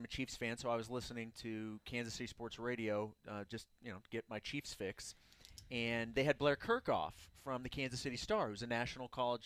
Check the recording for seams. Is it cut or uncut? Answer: uncut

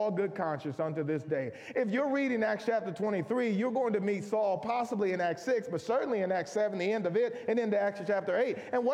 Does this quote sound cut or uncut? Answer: uncut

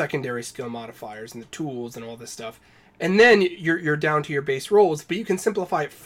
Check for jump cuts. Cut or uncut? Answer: uncut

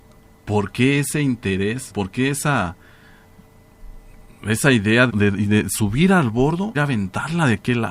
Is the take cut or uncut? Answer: cut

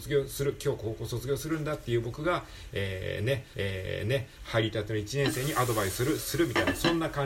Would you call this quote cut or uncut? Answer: cut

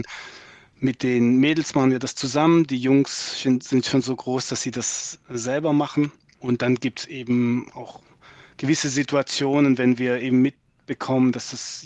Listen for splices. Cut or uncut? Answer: uncut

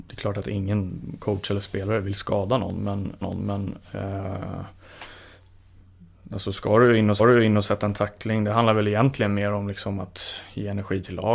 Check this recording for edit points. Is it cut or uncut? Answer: cut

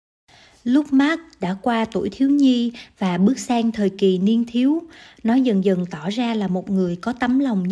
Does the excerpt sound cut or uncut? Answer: uncut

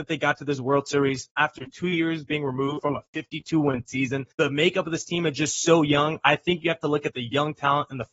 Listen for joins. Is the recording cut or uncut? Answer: cut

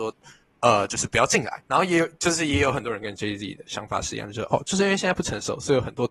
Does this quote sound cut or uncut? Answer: cut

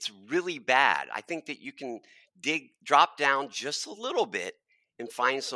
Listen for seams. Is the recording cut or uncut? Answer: uncut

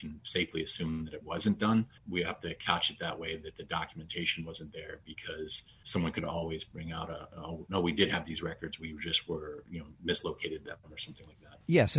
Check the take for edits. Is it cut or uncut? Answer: cut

